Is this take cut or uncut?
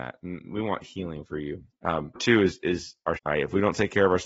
cut